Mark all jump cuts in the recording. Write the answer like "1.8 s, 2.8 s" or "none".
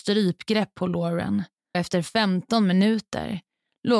1.7 s